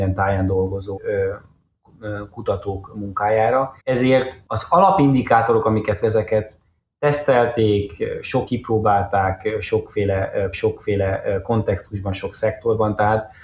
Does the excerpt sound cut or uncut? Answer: cut